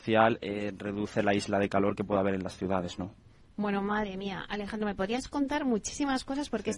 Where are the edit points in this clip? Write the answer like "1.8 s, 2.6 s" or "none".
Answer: none